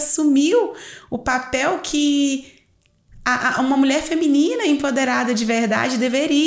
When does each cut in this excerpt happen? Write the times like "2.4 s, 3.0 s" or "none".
none